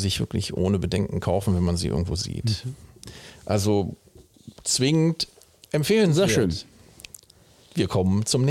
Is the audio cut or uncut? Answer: uncut